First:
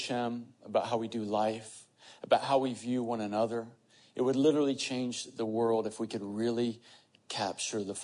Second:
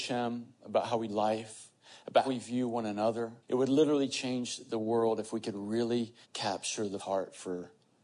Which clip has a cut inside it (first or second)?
second